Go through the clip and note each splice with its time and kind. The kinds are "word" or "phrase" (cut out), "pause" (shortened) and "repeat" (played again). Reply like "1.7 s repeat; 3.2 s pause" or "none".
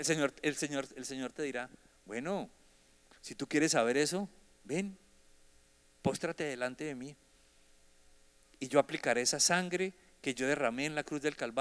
none